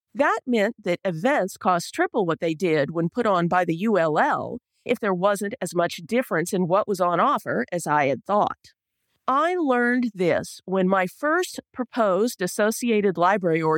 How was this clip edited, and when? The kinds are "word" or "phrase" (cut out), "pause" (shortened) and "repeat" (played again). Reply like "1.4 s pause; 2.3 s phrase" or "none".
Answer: 4.9 s word